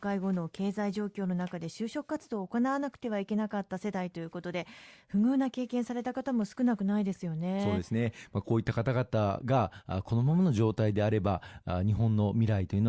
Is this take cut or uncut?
uncut